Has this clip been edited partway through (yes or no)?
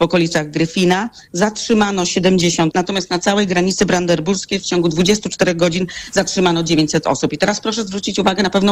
yes